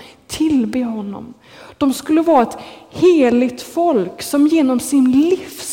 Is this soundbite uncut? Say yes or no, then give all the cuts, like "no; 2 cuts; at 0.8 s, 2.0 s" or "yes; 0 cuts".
yes; 0 cuts